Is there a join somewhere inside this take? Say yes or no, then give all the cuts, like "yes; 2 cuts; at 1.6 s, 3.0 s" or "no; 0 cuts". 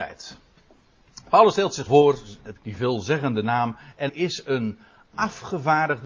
yes; 3 cuts; at 1.9 s, 2.6 s, 4.1 s